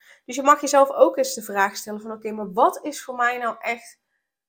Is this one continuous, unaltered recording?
yes; 0 cuts

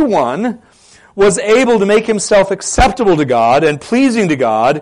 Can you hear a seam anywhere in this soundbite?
no; 0 cuts

